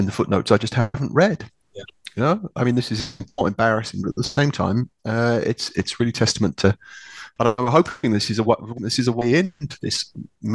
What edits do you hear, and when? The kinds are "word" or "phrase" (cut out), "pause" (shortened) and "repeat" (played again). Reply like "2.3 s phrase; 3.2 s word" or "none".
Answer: 8.8 s word